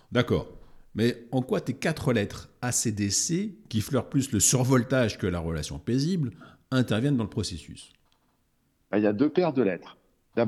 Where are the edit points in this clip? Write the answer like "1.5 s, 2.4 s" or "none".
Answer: none